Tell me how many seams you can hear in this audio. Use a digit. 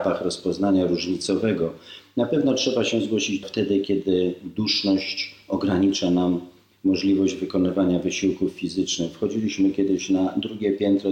1